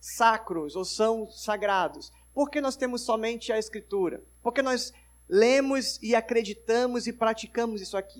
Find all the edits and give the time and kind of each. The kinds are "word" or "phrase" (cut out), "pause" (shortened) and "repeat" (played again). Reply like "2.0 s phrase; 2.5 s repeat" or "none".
none